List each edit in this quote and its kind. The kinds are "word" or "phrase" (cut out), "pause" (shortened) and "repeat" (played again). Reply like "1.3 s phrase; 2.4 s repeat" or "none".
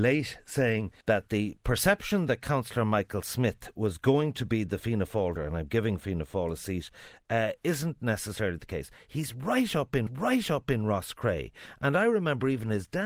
1.0 s pause; 5.4 s word; 10.1 s repeat